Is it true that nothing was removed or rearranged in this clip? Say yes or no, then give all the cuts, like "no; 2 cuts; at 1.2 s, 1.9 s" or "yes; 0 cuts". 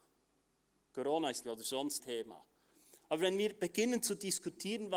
no; 2 cuts; at 1.4 s, 2.0 s